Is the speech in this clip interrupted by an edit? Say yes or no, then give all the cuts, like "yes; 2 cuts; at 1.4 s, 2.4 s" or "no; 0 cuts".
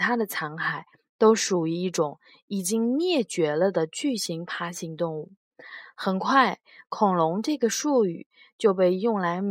no; 0 cuts